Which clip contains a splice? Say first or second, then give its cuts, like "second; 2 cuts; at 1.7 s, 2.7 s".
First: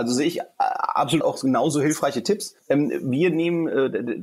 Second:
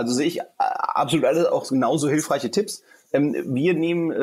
first; 2 cuts; at 1.2 s, 2.6 s